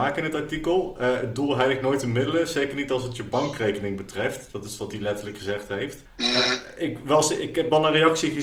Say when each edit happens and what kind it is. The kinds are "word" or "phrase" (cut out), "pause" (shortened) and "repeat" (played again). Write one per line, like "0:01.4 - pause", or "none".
0:06.1 - pause

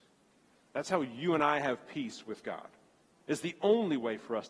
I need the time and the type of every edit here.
none

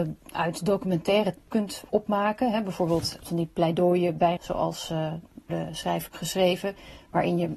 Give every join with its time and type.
0:01.4 - word
0:03.2 - word
0:04.4 - word
0:05.5 - word
0:06.1 - word

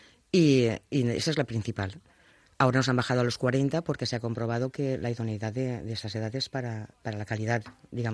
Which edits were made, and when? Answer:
none

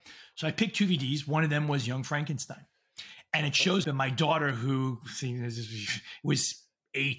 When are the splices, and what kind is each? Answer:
0:03.8 - word

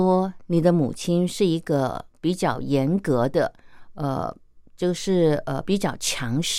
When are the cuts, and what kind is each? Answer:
0:02.1 - pause

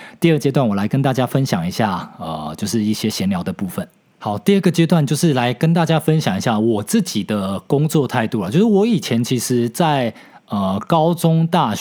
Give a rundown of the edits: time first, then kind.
none

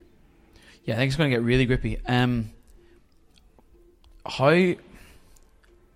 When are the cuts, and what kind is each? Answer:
none

